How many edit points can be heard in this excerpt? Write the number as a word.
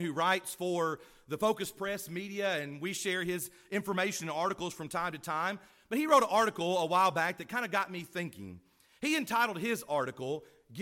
zero